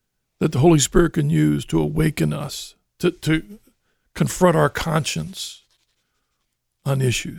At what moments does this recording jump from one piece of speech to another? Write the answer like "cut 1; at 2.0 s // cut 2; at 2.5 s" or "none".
none